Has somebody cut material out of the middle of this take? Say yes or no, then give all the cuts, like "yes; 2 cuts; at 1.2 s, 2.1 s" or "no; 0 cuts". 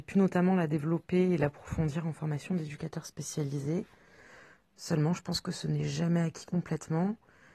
no; 0 cuts